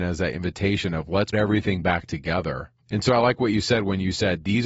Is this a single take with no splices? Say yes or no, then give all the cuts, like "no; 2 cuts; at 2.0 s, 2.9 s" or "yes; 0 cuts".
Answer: no; 2 cuts; at 1.3 s, 2.8 s